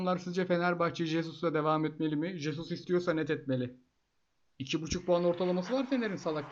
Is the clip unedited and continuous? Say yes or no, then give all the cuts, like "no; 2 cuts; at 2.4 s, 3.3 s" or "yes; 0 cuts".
yes; 0 cuts